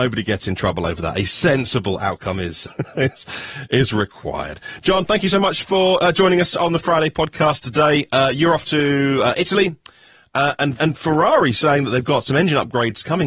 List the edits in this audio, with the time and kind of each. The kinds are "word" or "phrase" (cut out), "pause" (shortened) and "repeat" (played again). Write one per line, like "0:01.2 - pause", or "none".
0:02.7 - word
0:10.8 - word